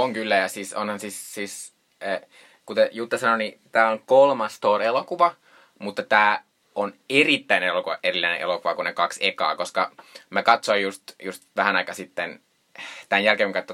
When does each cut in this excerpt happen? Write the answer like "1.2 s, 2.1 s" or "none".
none